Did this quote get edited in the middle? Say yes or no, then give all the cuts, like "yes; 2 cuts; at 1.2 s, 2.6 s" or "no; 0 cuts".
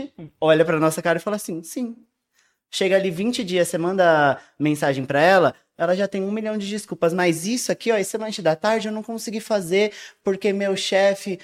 no; 0 cuts